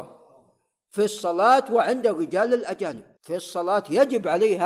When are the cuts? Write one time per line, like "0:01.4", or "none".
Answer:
0:03.1